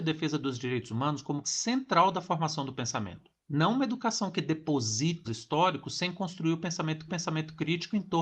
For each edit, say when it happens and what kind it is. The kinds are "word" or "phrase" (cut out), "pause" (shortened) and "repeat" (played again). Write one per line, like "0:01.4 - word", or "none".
0:01.4 - word
0:03.4 - pause
0:05.2 - word
0:07.1 - repeat